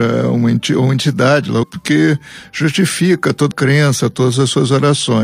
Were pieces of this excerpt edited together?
yes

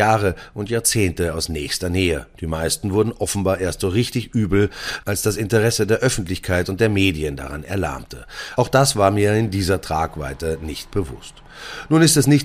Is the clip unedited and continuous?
yes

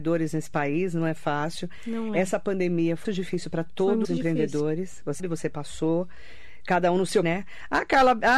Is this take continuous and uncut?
no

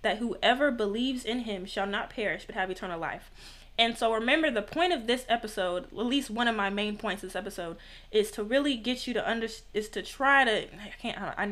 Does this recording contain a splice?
no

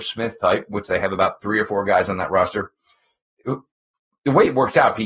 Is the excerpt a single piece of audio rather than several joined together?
yes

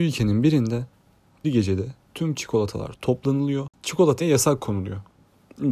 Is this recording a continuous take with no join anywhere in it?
no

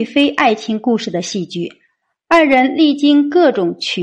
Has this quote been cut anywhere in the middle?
no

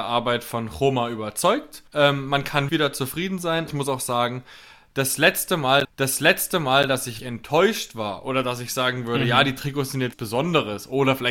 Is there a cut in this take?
yes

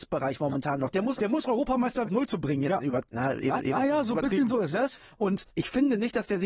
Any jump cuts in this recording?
yes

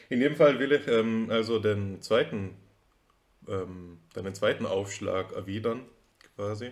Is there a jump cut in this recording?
no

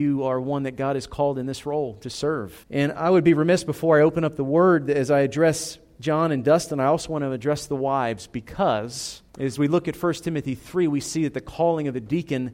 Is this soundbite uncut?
no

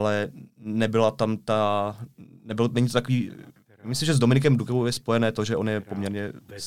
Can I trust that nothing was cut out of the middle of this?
yes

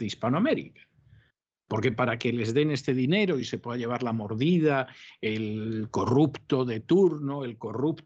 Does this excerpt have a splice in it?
no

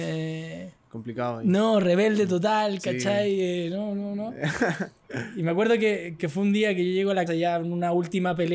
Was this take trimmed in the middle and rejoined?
yes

